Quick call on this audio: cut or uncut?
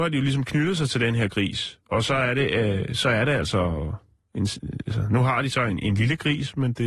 uncut